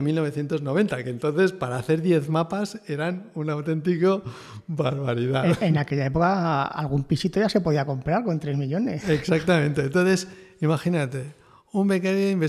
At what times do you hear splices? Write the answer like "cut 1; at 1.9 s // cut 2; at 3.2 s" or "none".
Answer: none